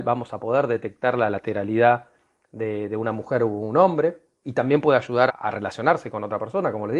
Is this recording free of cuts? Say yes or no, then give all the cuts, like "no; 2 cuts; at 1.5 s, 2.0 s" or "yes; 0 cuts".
no; 2 cuts; at 4.4 s, 5.3 s